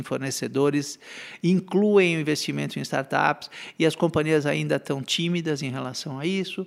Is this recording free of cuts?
yes; 0 cuts

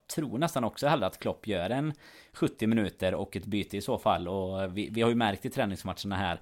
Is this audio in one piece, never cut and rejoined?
yes; 0 cuts

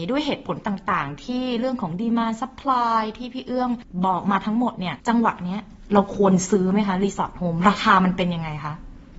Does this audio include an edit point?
yes; 1 cut; at 5.0 s

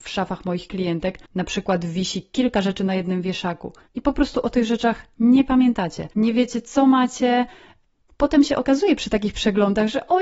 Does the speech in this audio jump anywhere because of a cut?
yes; 3 cuts; at 1.2 s, 3.9 s, 6.1 s

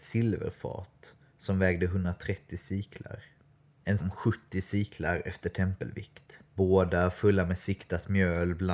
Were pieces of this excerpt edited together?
yes; 2 cuts; at 4.0 s, 6.5 s

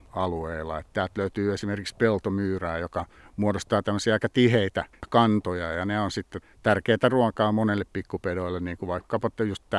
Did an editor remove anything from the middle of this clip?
no; 0 cuts

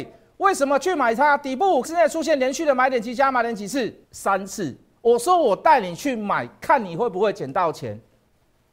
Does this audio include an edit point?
yes; 2 cuts; at 1.8 s, 4.0 s

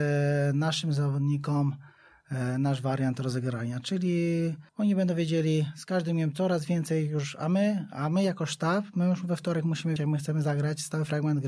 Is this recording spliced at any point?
yes; 2 cuts; at 4.7 s, 10.0 s

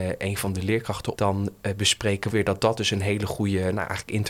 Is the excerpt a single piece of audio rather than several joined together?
no; 2 cuts; at 1.1 s, 2.3 s

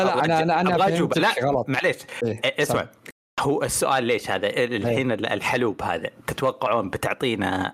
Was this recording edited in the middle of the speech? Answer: no; 0 cuts

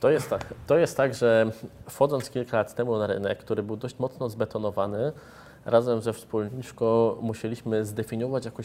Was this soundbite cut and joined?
no; 0 cuts

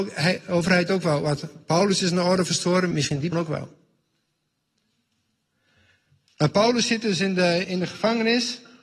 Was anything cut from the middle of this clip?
yes; 3 cuts; at 2.9 s, 3.3 s, 7.6 s

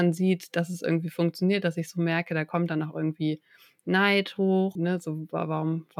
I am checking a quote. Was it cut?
yes; 1 cut; at 4.8 s

